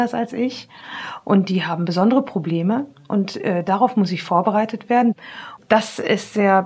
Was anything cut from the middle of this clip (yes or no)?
no